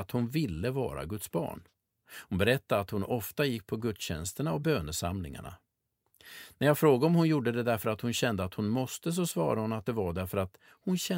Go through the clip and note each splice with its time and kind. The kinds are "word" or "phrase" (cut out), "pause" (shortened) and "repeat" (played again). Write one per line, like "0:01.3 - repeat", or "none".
none

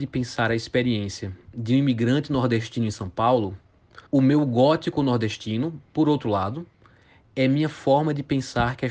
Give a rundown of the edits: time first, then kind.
0:04.1 - pause

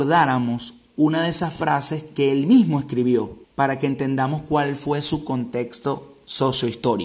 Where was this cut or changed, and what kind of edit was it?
0:03.4 - pause

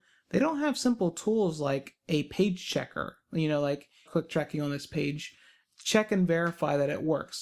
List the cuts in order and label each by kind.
0:04.1 - phrase

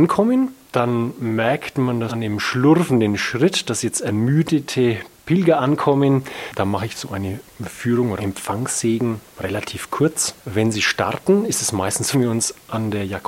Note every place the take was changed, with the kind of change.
0:02.1 - word
0:08.2 - word
0:09.3 - pause
0:10.4 - pause
0:12.1 - phrase

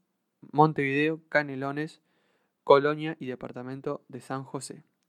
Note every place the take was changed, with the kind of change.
none

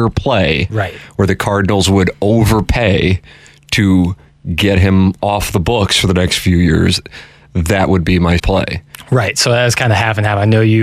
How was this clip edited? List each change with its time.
0:08.4 - word

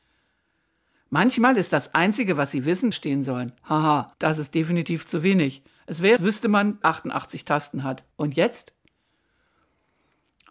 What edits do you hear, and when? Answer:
0:02.9 - phrase
0:03.6 - pause
0:04.1 - pause
0:05.8 - pause
0:06.2 - word
0:06.8 - phrase
0:08.1 - pause

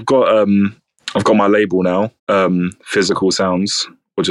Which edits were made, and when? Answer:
0:02.2 - pause

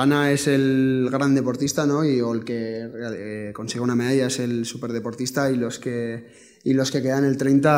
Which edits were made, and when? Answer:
none

